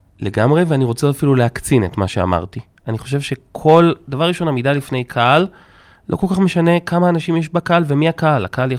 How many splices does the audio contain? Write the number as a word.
zero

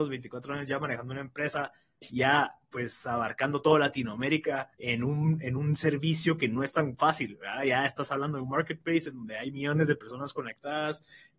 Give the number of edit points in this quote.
one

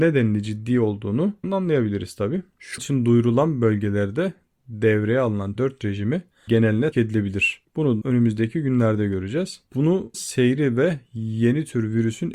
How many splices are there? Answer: seven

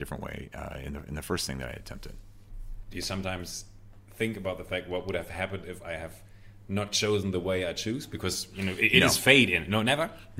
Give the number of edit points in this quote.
zero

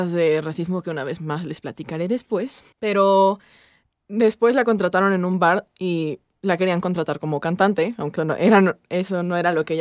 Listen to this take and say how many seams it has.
two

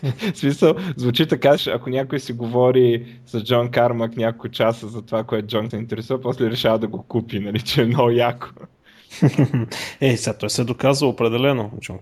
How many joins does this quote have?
two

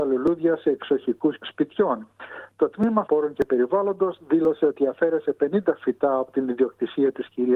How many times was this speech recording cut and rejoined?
two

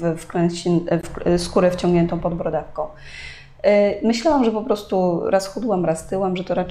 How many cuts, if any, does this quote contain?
zero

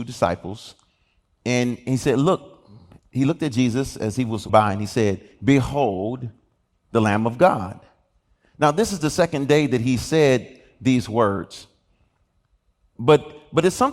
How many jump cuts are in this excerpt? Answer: one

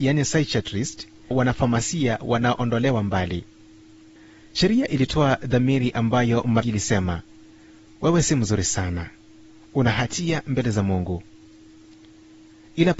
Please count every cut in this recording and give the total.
two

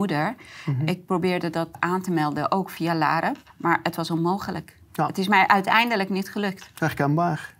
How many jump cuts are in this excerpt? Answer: two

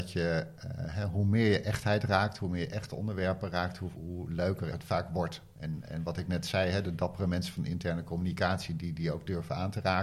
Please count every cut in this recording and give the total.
two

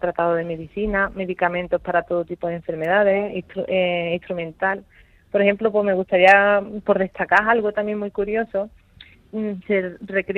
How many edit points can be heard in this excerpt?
zero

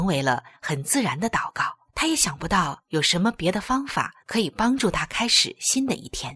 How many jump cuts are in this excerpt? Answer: two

